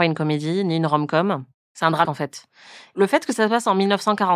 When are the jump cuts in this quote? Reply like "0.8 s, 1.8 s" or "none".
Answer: 2.0 s